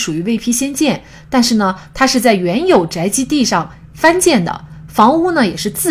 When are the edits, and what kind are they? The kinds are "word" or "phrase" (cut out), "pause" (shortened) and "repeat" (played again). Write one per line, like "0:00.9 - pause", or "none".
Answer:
none